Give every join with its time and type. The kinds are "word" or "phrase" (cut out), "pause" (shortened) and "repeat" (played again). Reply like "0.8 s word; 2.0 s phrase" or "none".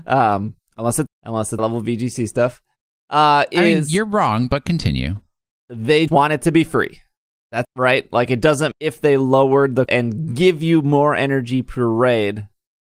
1.1 s word; 1.6 s word; 6.1 s word; 7.6 s word; 8.7 s word; 9.9 s word

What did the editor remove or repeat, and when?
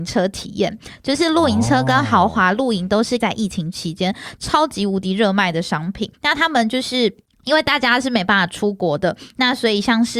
3.2 s word; 6.1 s pause; 7.3 s pause

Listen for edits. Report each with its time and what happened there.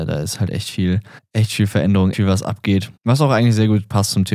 1.2 s pause; 2.1 s word; 3.0 s pause

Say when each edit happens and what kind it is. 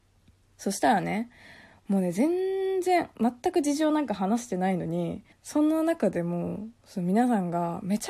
5.3 s pause

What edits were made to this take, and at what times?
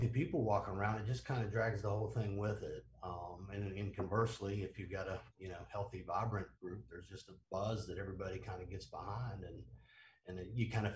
5.3 s pause; 6.5 s pause; 7.4 s pause

